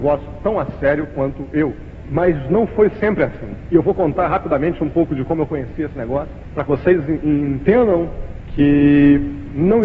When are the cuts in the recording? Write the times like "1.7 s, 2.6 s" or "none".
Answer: none